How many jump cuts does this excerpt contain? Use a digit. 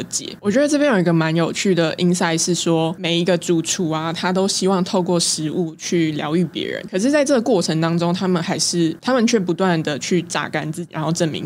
0